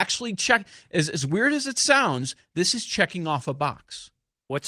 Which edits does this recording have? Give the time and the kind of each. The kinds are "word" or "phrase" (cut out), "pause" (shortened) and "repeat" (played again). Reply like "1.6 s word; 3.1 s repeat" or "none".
none